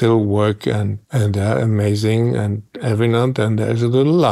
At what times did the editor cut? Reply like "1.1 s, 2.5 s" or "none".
1.0 s